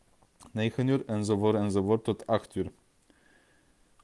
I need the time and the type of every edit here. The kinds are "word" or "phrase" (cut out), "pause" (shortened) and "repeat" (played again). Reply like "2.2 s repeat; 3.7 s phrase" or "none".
none

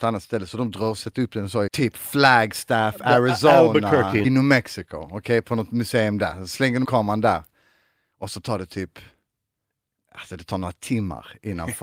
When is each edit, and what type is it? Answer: 1.7 s word; 4.2 s word; 6.8 s word

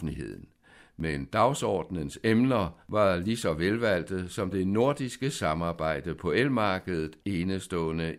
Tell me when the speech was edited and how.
2.8 s pause; 4.5 s phrase; 7.2 s word

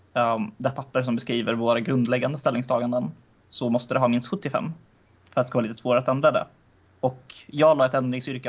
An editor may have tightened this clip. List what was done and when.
none

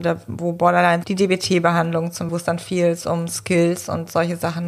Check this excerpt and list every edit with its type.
1.0 s word; 2.3 s word

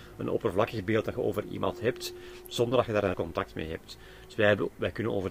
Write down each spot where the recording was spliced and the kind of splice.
3.1 s word

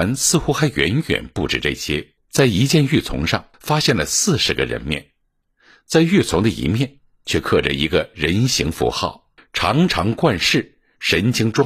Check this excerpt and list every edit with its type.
2.2 s pause; 3.5 s pause; 9.4 s pause

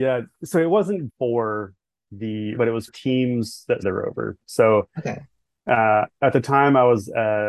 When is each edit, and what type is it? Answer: 1.1 s word; 2.6 s word; 2.9 s word; 3.8 s word

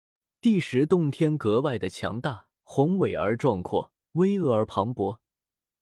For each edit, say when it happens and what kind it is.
2.6 s pause; 4.0 s pause

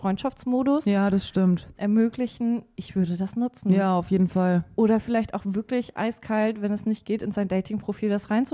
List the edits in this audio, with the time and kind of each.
none

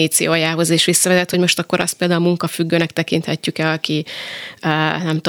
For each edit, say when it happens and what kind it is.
none

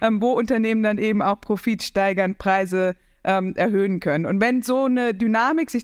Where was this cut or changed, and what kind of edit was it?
none

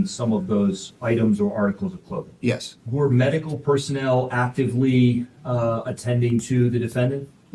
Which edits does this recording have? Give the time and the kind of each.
none

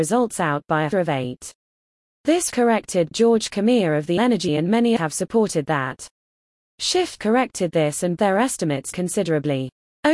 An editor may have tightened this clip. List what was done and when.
0.9 s word; 2.5 s word; 3.1 s word; 4.2 s word; 4.5 s word; 5.0 s word; 7.2 s word; 8.2 s word; 8.9 s word

